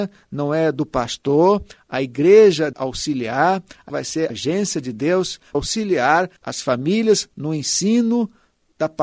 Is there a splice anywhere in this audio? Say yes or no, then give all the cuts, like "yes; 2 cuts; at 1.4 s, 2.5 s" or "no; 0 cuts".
yes; 5 cuts; at 2.7 s, 3.9 s, 4.3 s, 5.5 s, 6.4 s